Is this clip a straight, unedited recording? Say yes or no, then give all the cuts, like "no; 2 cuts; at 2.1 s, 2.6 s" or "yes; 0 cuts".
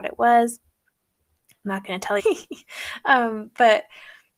no; 1 cut; at 2.2 s